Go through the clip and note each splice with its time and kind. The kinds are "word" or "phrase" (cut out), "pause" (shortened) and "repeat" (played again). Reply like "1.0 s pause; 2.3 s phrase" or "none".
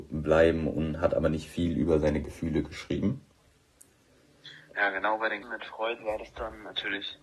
5.4 s word